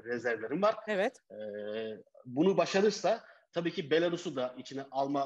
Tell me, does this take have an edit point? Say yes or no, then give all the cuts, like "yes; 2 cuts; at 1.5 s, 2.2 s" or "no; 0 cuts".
no; 0 cuts